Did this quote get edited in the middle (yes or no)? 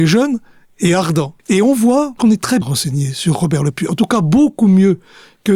yes